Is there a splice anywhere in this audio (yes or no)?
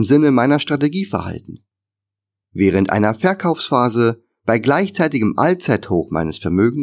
no